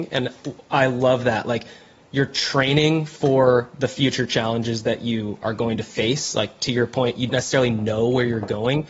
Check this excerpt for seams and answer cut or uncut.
cut